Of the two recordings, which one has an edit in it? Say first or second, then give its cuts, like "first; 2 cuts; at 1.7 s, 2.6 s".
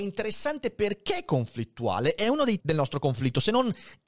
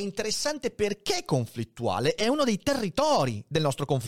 first; 1 cut; at 2.6 s